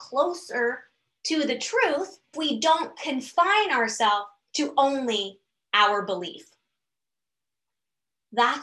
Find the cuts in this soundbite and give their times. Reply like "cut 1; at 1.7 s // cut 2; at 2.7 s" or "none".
cut 1; at 2.3 s